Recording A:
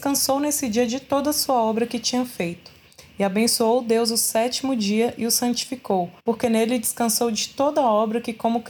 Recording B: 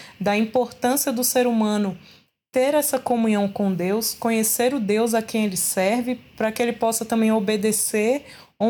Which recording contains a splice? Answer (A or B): A